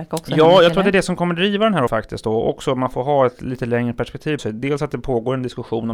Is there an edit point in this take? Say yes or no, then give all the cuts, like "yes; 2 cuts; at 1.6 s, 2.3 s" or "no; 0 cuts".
yes; 2 cuts; at 1.9 s, 4.4 s